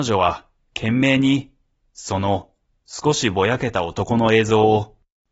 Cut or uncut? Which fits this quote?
uncut